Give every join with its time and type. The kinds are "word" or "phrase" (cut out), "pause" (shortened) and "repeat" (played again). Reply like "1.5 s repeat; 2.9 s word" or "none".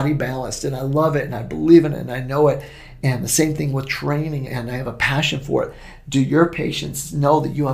4.5 s word